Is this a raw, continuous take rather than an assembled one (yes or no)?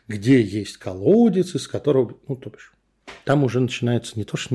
yes